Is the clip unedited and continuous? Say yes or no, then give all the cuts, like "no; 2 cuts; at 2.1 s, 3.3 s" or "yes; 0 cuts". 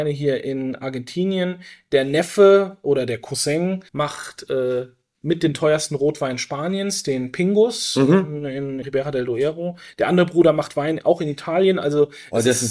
no; 2 cuts; at 3.9 s, 8.8 s